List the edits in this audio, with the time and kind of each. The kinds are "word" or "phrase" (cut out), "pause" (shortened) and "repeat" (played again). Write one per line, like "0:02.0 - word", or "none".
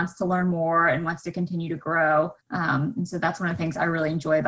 0:02.4 - pause